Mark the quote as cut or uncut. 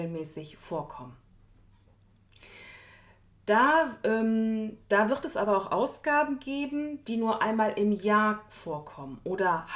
uncut